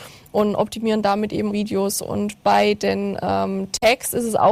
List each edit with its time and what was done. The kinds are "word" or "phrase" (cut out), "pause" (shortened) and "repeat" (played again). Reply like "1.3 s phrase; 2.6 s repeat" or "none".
1.5 s word